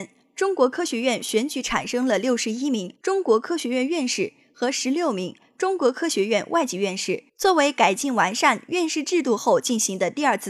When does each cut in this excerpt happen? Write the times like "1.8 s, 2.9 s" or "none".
3.0 s, 7.3 s